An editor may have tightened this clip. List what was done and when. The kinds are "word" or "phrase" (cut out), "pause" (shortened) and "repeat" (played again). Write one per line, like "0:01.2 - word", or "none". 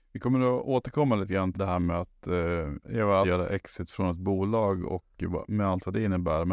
0:01.5 - word
0:03.2 - phrase